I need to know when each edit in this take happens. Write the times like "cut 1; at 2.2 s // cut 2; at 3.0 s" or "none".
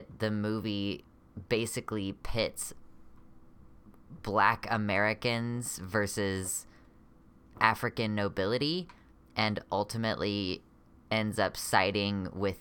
none

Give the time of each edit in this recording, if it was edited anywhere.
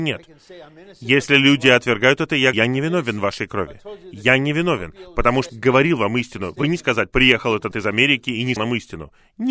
cut 1; at 2.5 s // cut 2; at 5.5 s // cut 3; at 6.8 s // cut 4; at 7.7 s // cut 5; at 8.6 s

